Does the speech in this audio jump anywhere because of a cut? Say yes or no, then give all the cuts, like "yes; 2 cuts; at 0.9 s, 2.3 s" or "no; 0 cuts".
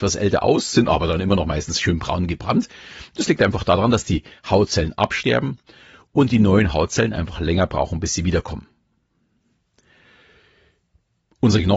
no; 0 cuts